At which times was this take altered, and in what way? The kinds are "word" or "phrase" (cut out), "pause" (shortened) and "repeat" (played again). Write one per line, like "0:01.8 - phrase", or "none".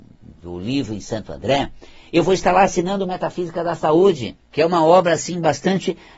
0:04.4 - pause